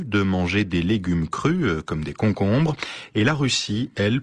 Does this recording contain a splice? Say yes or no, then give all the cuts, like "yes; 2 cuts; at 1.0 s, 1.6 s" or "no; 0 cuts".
no; 0 cuts